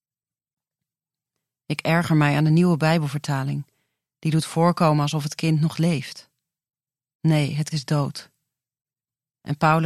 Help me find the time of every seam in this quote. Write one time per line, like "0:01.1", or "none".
0:07.7